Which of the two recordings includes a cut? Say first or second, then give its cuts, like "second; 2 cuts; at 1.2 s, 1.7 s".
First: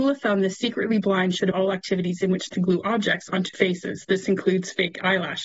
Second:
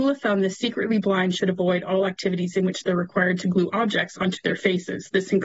first; 3 cuts; at 1.5 s, 2.5 s, 3.5 s